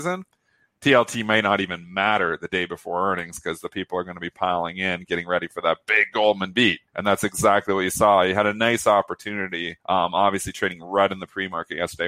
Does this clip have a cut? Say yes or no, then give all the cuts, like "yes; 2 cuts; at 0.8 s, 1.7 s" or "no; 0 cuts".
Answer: yes; 2 cuts; at 6.9 s, 9.8 s